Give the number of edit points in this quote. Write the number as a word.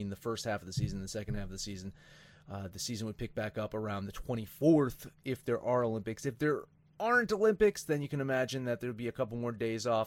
zero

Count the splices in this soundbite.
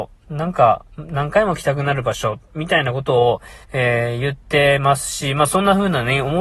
one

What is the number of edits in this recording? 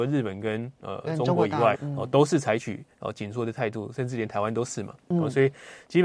one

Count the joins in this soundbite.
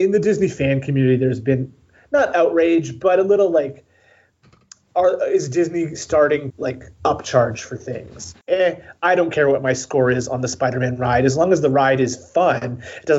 three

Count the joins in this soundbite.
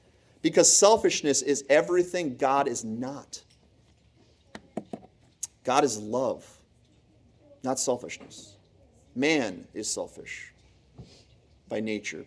zero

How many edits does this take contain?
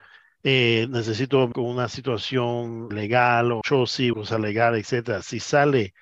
four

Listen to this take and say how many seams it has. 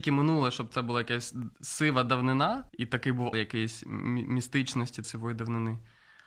four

